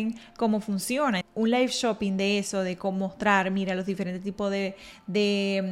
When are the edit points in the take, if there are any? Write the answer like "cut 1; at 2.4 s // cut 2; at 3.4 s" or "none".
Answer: cut 1; at 1.2 s